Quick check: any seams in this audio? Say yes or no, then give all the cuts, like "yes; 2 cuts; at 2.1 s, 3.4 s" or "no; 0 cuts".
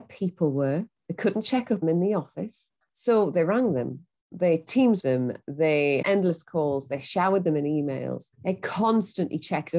yes; 6 cuts; at 1.0 s, 1.8 s, 2.8 s, 5.0 s, 6.0 s, 8.3 s